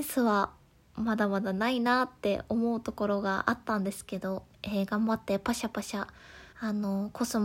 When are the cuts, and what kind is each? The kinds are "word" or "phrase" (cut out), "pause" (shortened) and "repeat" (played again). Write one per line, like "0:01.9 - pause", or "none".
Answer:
0:04.5 - pause
0:06.5 - pause